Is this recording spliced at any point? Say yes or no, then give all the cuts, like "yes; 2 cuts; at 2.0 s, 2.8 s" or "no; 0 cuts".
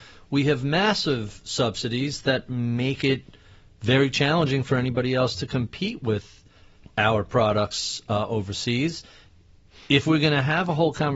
no; 0 cuts